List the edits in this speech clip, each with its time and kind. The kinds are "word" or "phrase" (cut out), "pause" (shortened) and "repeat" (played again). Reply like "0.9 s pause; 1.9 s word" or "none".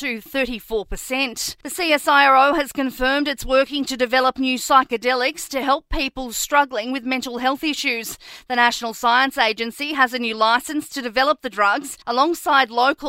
1.6 s pause; 12.0 s pause